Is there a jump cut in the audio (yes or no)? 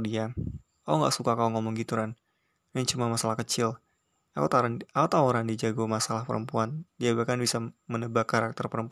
no